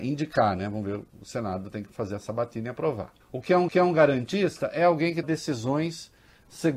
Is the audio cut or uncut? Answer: cut